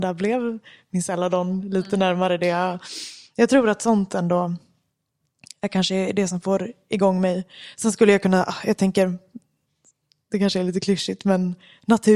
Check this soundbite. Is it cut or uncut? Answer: uncut